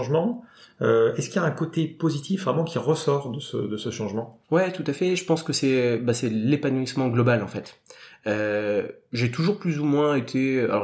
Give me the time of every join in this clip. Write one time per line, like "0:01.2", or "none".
0:04.4